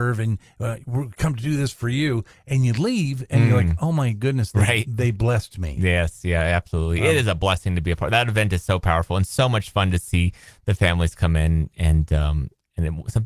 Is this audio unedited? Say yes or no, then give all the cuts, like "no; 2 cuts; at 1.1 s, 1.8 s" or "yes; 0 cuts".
yes; 0 cuts